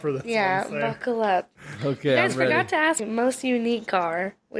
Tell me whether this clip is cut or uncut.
cut